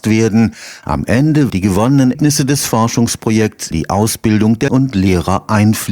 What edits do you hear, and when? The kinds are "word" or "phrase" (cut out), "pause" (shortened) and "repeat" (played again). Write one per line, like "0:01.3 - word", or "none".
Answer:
0:01.5 - word
0:02.1 - word
0:03.7 - word
0:04.7 - word